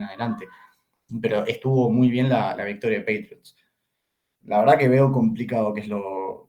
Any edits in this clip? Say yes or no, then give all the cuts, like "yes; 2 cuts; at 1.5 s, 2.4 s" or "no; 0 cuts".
no; 0 cuts